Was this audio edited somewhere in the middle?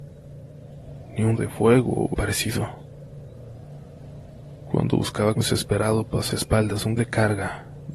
yes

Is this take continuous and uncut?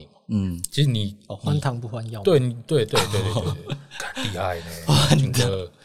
yes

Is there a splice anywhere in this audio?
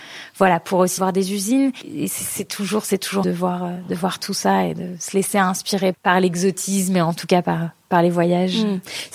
yes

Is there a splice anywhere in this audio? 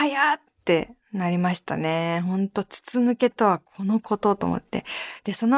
yes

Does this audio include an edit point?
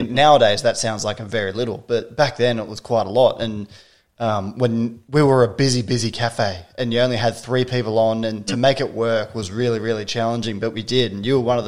no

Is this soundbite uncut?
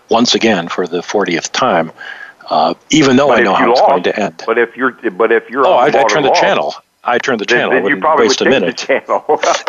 no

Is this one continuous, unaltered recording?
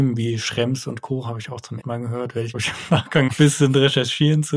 no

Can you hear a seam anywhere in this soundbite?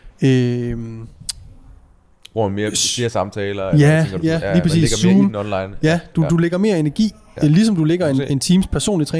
no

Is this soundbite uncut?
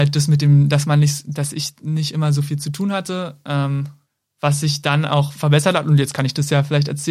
yes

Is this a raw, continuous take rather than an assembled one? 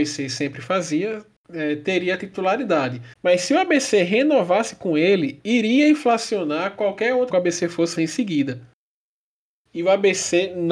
no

